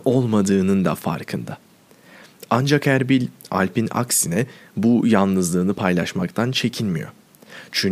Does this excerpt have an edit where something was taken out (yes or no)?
no